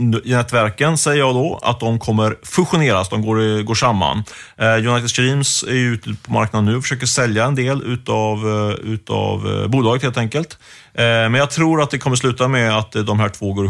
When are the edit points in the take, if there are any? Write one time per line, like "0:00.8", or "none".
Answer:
none